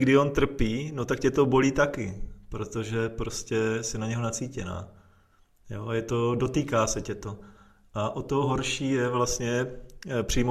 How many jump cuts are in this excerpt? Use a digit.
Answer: 0